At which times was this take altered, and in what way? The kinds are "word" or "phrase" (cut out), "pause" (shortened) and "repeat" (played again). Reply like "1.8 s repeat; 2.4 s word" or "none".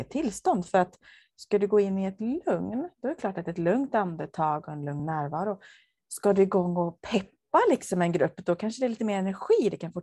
none